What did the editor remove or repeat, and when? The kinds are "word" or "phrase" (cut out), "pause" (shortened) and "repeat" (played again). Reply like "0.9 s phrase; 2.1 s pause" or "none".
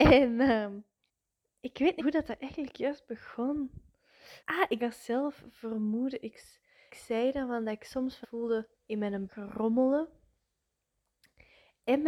1.1 s pause; 2.0 s word; 4.4 s pause; 4.8 s phrase; 6.9 s word; 8.2 s word; 8.7 s pause; 9.3 s word